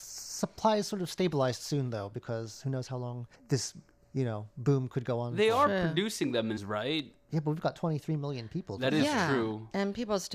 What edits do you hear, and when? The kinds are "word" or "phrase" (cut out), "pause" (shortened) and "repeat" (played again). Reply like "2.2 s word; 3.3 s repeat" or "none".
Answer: 3.3 s pause; 6.6 s phrase